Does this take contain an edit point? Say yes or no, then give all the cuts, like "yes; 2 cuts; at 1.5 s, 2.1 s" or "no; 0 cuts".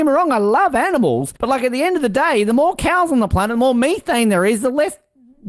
yes; 1 cut; at 1.4 s